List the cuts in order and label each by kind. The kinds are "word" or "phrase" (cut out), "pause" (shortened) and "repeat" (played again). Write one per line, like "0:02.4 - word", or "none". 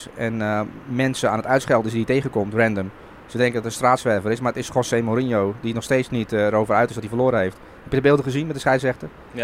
none